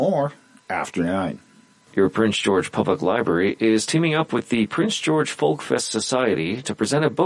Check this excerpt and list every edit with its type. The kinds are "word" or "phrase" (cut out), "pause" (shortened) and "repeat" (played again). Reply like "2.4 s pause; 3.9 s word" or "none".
none

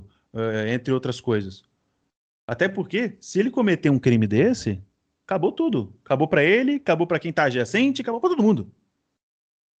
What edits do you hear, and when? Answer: none

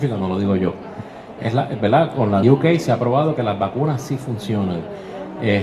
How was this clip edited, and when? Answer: 2.4 s word

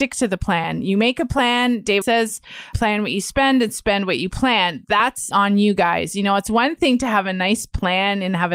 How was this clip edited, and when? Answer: 2.0 s word; 2.7 s word; 5.3 s word

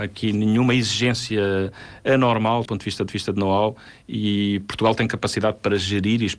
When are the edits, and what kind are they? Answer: 2.7 s word; 3.1 s repeat

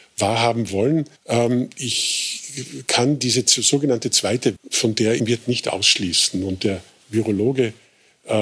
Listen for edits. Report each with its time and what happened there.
1.2 s pause; 4.6 s word; 5.2 s phrase

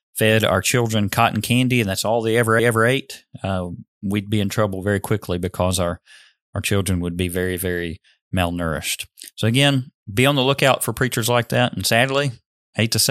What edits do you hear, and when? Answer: 2.6 s repeat

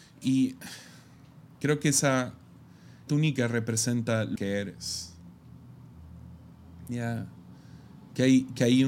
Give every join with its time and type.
1.5 s pause; 3.1 s word; 4.4 s word

